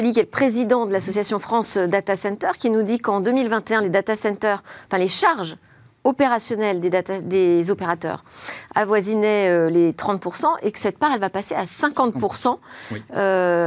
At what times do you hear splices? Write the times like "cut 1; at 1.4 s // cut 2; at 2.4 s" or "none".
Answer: none